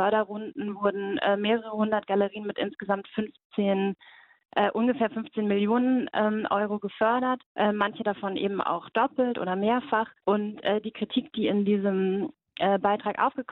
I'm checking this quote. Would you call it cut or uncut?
cut